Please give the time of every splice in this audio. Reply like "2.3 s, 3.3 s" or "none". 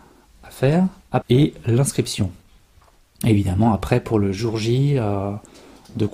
1.2 s